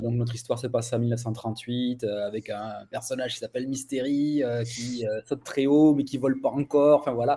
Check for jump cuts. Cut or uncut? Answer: uncut